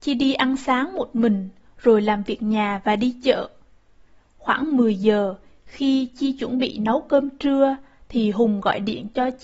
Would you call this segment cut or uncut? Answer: uncut